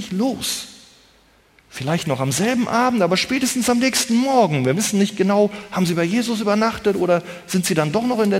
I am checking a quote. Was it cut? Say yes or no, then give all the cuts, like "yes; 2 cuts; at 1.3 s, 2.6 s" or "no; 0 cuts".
no; 0 cuts